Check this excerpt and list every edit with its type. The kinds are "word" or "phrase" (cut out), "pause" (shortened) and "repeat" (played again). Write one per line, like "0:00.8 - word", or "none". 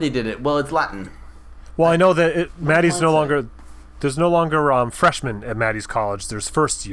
none